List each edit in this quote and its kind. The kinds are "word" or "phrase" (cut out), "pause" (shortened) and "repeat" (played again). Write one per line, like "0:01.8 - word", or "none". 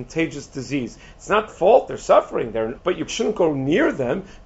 0:01.5 - word
0:01.9 - word
0:02.8 - word
0:03.1 - word